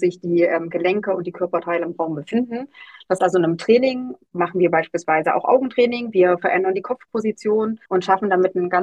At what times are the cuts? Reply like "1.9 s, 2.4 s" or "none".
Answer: 3.2 s, 7.9 s

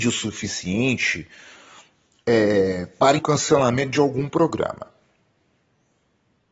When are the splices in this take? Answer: 3.2 s

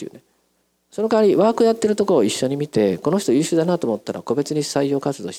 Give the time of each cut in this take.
none

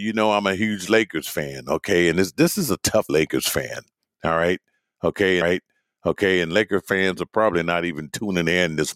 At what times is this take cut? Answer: 3.1 s, 5.4 s

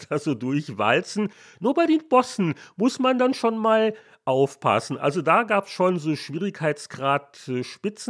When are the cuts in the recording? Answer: none

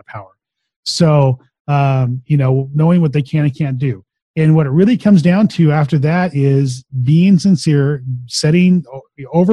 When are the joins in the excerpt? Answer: none

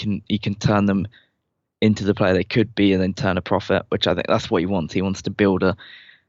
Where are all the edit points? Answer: none

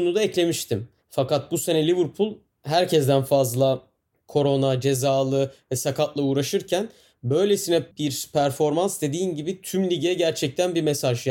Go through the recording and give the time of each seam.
7.9 s

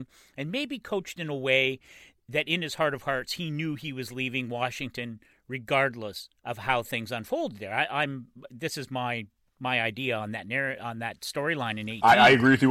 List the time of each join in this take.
none

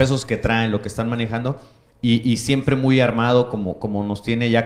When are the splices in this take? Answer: none

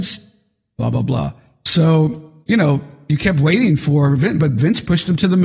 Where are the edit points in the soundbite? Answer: 2.4 s

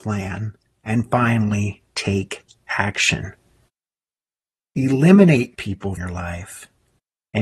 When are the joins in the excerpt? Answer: 5.6 s, 6.0 s

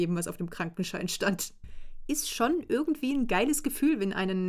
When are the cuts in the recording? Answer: none

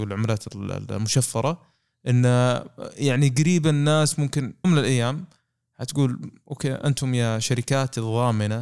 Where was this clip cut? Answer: 4.6 s

